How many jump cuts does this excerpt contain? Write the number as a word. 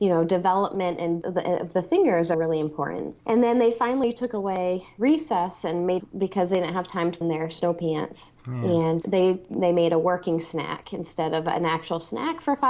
seven